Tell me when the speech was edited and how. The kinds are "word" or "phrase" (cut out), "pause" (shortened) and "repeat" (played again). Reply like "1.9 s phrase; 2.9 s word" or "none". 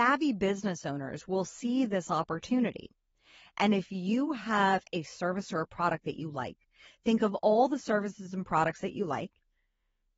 none